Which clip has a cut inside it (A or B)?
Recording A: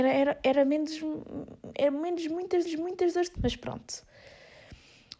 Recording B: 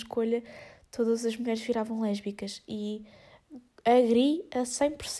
A